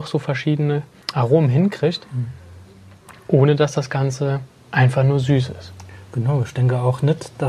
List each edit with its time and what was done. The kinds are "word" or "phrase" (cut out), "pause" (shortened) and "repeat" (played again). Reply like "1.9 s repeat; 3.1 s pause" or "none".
1.0 s pause